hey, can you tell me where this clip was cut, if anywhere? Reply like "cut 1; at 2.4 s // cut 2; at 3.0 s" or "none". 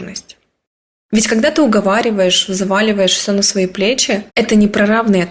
cut 1; at 4.3 s